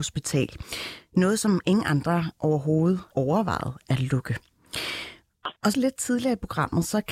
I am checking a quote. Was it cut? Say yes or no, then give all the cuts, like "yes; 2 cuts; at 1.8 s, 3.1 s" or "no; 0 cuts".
yes; 2 cuts; at 3.1 s, 5.7 s